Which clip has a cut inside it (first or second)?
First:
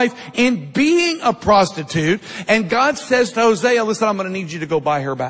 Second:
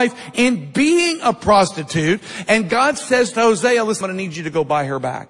second